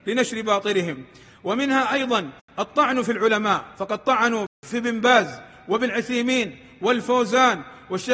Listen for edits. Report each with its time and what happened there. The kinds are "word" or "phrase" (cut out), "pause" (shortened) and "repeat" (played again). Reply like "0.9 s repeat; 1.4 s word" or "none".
3.7 s pause

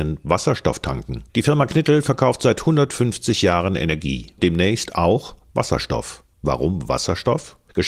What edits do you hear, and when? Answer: 1.3 s pause; 6.3 s pause

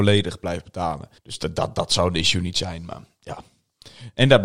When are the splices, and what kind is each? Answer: 1.2 s pause

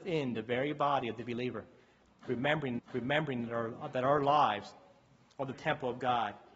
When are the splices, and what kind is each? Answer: 2.8 s repeat; 5.5 s word

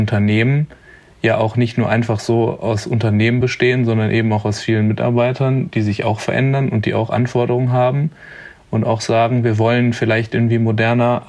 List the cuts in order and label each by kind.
none

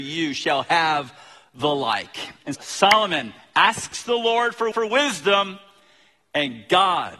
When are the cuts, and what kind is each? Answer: 2.5 s word; 4.7 s repeat

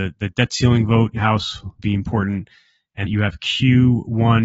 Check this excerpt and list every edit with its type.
1.2 s word; 1.8 s word; 3.1 s word

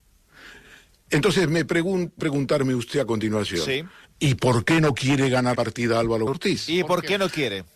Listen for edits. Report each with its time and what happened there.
2.2 s word; 5.5 s word; 6.3 s word

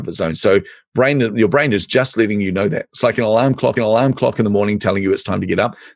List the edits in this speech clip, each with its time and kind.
3.8 s repeat

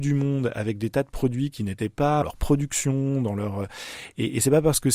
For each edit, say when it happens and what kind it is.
2.2 s phrase

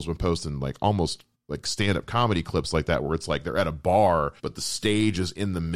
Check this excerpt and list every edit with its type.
1.3 s pause; 4.4 s pause

